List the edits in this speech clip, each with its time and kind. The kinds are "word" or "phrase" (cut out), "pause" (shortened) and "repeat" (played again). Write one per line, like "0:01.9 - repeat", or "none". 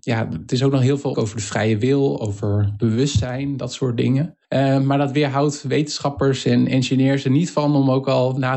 0:01.1 - word
0:04.4 - pause